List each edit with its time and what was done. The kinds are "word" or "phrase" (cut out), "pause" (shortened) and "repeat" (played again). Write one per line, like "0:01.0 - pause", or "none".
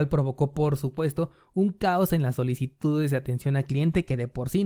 none